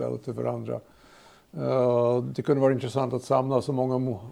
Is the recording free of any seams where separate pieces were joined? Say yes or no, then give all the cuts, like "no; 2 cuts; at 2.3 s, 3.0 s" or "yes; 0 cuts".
yes; 0 cuts